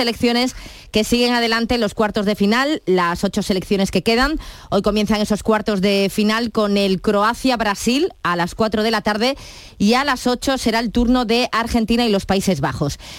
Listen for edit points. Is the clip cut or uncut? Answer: uncut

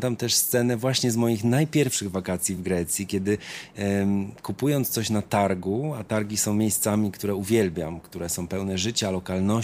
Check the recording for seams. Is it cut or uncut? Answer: uncut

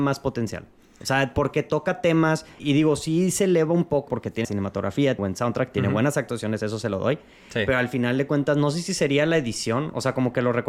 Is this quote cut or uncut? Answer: cut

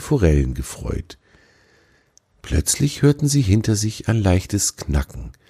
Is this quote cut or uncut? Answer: uncut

